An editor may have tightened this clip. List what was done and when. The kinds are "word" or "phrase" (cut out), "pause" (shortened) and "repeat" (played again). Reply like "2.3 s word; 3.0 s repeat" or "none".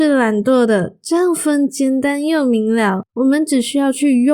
3.1 s pause

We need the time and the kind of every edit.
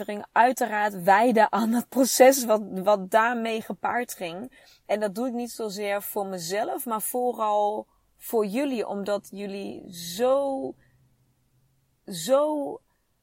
none

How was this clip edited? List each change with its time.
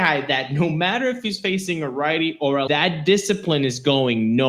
2.7 s word

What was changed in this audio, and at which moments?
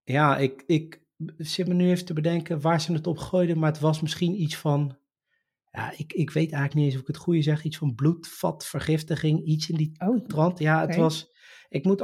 none

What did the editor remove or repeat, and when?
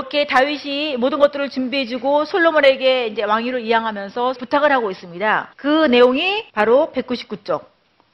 4.4 s word; 5.5 s pause; 6.5 s pause

